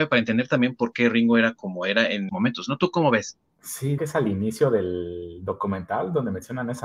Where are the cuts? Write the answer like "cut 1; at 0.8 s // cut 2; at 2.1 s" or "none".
cut 1; at 2.3 s // cut 2; at 4.0 s